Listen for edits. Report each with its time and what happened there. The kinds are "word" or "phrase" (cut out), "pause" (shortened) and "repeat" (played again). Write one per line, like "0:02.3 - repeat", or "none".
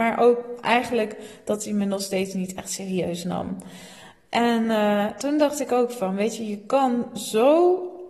none